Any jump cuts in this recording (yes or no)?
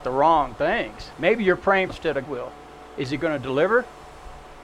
yes